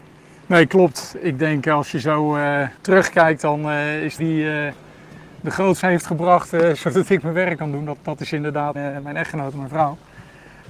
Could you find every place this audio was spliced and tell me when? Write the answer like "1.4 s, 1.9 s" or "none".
2.8 s, 4.2 s, 5.8 s, 8.7 s